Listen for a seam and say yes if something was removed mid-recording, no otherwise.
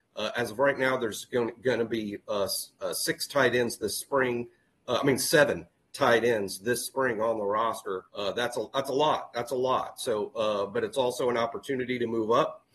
yes